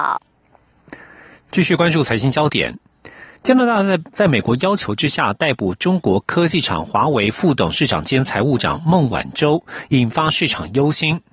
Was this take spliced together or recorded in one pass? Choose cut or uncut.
uncut